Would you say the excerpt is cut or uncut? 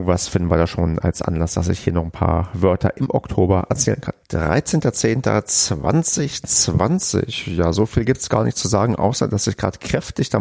cut